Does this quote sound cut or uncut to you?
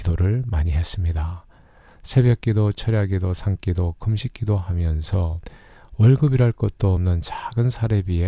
uncut